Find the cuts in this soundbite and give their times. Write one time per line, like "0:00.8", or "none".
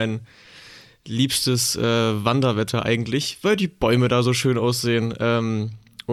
none